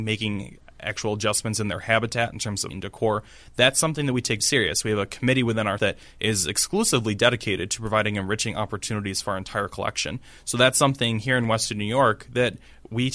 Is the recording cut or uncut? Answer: cut